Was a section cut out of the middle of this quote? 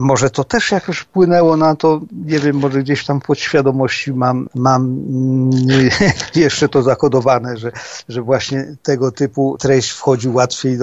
no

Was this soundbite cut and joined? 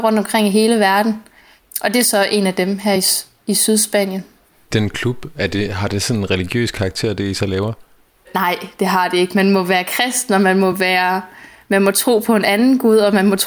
no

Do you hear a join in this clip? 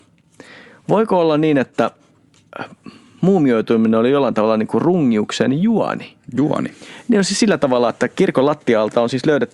no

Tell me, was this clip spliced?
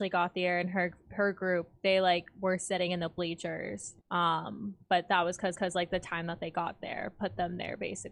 yes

